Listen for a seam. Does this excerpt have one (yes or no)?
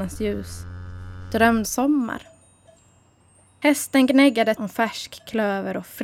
yes